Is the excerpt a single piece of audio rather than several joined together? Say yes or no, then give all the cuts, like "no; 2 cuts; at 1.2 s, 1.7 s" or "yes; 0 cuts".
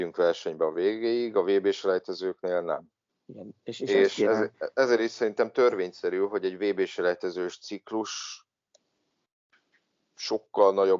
no; 1 cut; at 3.1 s